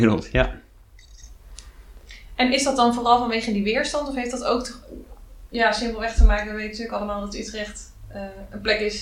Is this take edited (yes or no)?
no